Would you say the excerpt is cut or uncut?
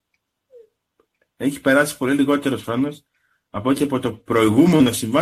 uncut